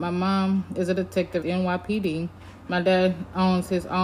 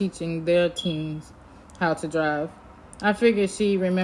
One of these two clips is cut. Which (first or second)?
first